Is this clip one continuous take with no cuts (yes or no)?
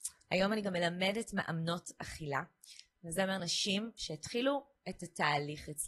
yes